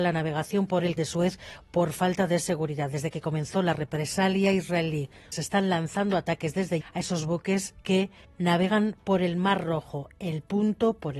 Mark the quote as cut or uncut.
cut